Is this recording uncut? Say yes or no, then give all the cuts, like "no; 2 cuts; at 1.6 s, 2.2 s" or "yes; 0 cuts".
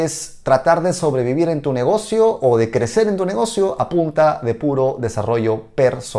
yes; 0 cuts